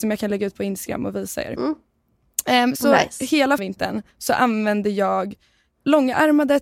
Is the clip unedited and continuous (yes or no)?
no